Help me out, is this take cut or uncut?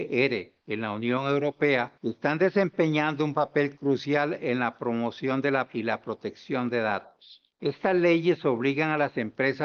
cut